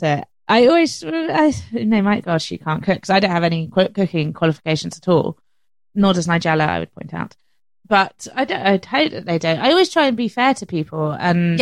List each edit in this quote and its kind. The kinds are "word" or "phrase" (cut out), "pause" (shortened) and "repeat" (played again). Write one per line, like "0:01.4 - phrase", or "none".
0:02.2 - word